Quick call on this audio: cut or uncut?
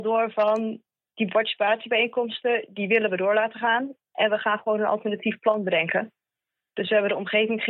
uncut